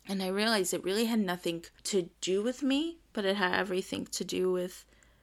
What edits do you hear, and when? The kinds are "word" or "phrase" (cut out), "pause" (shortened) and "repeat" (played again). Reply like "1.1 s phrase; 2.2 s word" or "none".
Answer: 1.8 s pause; 2.1 s pause